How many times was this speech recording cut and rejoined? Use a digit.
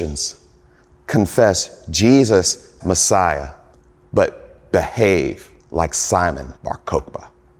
4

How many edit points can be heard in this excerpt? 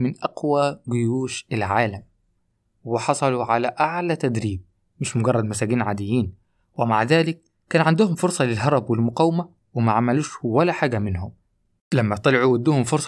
0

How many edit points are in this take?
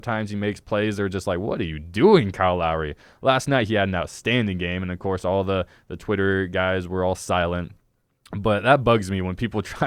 0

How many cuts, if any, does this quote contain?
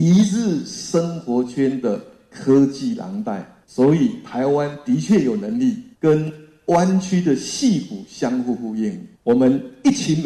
3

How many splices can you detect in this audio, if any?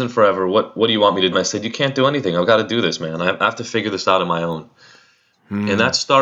1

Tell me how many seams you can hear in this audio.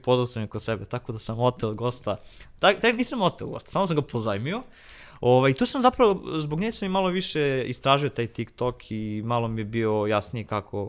0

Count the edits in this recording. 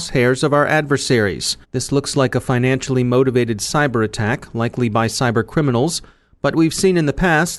1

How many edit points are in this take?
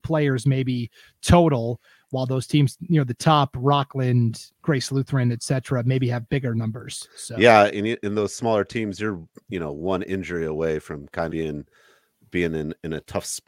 2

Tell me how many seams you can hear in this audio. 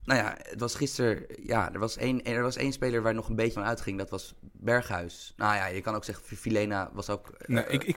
1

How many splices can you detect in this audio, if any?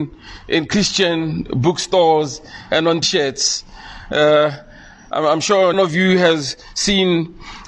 2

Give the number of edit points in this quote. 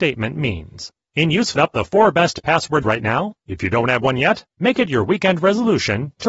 5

